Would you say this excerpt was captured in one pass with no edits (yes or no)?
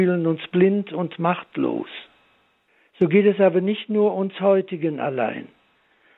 yes